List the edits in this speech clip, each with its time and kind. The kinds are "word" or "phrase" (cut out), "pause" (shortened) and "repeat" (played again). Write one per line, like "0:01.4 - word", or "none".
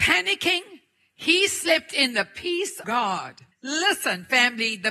0:02.8 - word
0:03.5 - pause